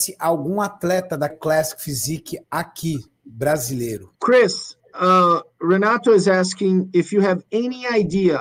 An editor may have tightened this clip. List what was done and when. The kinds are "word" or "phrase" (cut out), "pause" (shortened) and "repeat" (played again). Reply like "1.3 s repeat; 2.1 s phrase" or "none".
1.3 s word; 2.4 s pause; 4.2 s pause